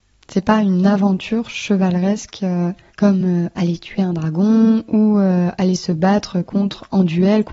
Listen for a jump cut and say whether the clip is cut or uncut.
uncut